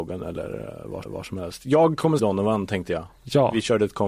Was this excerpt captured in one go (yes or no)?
no